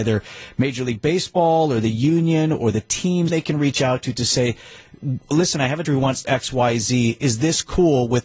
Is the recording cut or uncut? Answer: cut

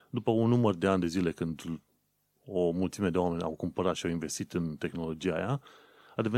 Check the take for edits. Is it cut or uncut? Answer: uncut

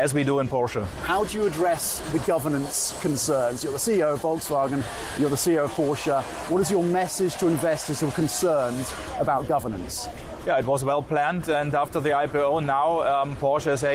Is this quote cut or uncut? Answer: uncut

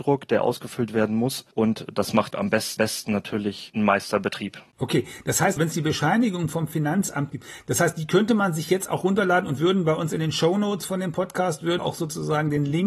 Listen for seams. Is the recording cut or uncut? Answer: cut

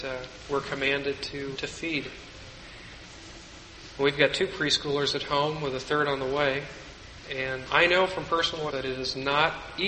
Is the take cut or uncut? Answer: cut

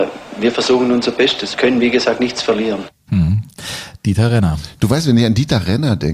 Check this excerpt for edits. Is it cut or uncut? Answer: cut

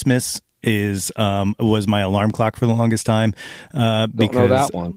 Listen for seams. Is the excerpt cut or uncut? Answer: uncut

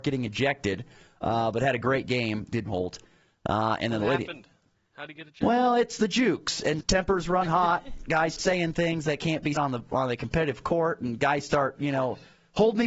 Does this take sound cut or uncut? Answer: cut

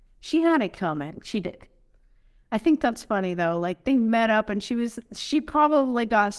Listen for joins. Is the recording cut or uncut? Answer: uncut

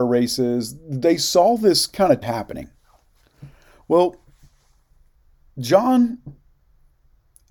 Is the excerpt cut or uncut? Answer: cut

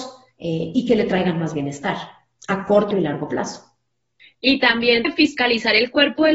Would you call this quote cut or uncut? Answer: cut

